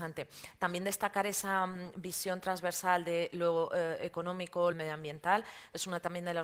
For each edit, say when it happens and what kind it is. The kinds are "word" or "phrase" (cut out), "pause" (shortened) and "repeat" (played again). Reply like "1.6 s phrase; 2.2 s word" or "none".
4.7 s phrase